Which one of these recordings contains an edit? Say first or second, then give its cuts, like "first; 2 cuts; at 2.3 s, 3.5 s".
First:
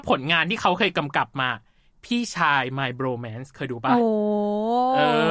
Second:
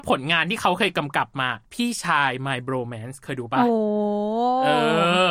second; 1 cut; at 1.7 s